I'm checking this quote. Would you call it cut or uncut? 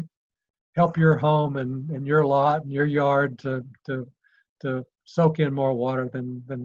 uncut